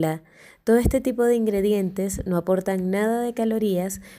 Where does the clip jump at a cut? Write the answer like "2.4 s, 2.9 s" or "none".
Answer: none